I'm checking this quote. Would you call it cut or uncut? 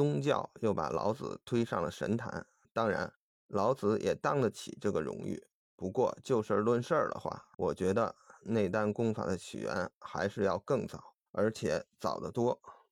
cut